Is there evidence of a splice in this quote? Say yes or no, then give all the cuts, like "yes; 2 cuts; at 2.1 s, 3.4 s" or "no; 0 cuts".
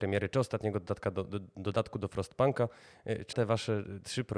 yes; 1 cut; at 3.3 s